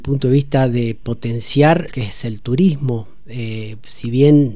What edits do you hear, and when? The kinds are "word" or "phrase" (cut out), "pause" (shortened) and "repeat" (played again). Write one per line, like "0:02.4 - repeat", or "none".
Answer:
0:01.9 - word